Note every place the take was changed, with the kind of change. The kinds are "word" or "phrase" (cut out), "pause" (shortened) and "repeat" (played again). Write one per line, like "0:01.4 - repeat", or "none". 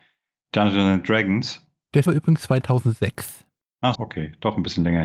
0:02.1 - word
0:03.9 - word